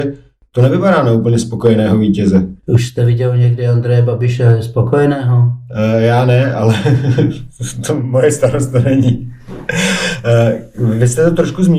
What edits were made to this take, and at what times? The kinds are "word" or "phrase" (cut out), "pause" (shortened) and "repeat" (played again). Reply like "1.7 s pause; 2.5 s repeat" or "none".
2.6 s pause